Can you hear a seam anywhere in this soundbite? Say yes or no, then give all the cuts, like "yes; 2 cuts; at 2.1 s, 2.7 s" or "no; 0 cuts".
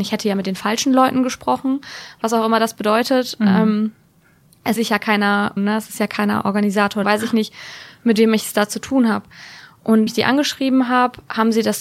yes; 4 cuts; at 4.8 s, 5.6 s, 7.0 s, 10.1 s